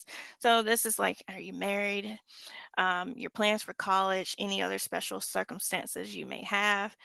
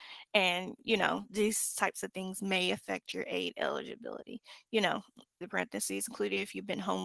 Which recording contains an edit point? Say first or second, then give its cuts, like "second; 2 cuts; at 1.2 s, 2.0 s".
second; 1 cut; at 5.4 s